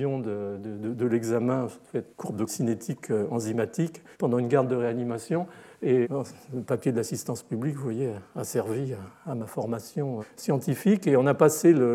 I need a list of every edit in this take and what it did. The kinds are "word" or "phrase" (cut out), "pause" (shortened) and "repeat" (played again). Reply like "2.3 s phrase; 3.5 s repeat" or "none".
2.1 s pause; 2.5 s phrase; 4.1 s pause; 6.0 s word; 10.2 s word